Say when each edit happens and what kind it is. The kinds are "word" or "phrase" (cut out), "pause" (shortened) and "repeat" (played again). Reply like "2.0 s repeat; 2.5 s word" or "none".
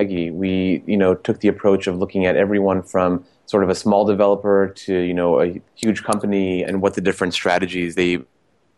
5.7 s pause; 6.6 s word